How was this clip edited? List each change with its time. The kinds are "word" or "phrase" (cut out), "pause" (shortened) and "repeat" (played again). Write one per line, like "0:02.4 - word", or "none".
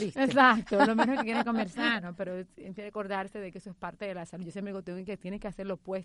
none